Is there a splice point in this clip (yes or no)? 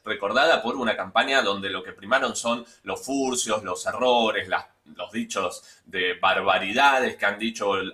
no